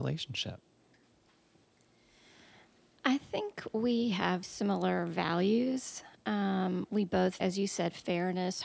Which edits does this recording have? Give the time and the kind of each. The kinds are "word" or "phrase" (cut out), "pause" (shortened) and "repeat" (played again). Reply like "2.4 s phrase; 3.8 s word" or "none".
4.4 s word; 7.4 s word